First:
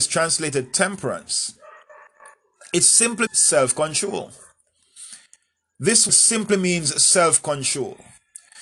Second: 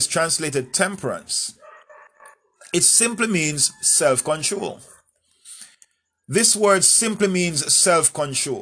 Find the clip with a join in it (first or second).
first